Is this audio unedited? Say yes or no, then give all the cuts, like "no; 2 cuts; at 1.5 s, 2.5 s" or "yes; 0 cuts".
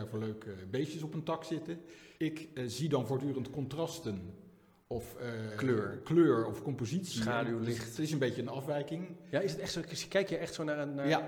no; 1 cut; at 2.2 s